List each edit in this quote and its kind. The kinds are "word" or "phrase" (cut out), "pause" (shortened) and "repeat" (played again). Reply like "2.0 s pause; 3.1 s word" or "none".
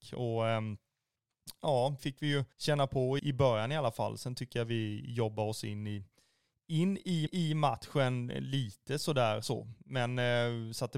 2.0 s phrase; 2.5 s pause; 3.2 s word; 7.3 s repeat; 9.4 s word